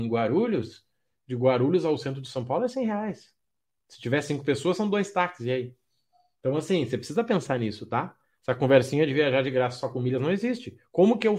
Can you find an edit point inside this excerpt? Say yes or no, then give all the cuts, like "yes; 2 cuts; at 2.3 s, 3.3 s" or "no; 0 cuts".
no; 0 cuts